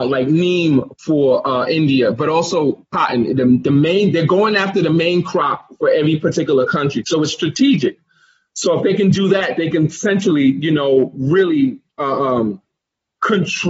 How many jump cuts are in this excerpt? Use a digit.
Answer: 0